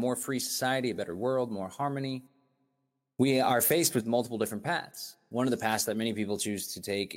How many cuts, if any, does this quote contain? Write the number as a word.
zero